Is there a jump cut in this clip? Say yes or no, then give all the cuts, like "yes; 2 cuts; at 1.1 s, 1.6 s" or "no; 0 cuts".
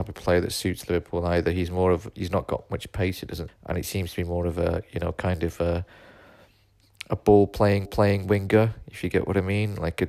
yes; 2 cuts; at 3.5 s, 7.9 s